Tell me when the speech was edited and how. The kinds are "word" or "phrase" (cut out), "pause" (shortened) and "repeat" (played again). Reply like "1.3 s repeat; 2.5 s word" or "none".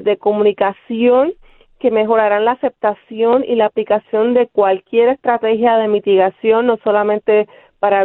none